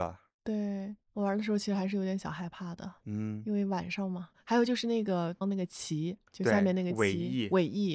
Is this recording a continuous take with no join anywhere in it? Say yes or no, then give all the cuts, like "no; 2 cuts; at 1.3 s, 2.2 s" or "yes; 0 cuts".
no; 2 cuts; at 1.0 s, 6.3 s